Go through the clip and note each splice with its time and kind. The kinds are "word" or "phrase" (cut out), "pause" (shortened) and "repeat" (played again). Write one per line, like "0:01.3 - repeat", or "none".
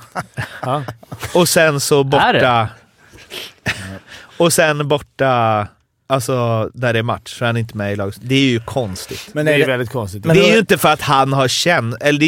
none